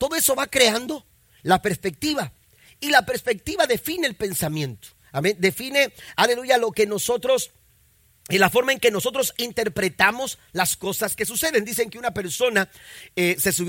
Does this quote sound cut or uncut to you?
uncut